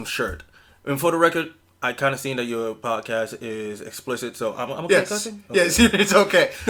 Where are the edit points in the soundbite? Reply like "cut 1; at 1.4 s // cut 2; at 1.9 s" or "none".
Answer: none